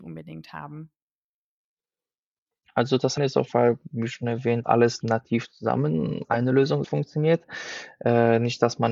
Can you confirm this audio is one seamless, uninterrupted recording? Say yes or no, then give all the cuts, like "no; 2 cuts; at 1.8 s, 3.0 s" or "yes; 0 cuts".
no; 6 cuts; at 3.2 s, 3.5 s, 4.6 s, 5.0 s, 6.2 s, 6.8 s